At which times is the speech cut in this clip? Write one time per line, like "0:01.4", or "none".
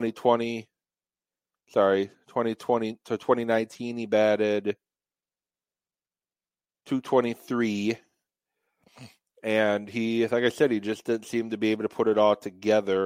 none